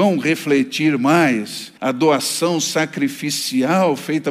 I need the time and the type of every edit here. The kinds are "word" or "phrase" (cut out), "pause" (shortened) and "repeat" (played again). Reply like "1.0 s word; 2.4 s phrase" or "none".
1.8 s pause